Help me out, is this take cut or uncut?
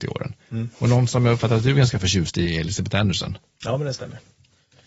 uncut